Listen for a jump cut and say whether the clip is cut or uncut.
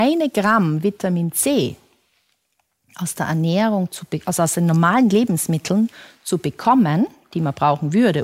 uncut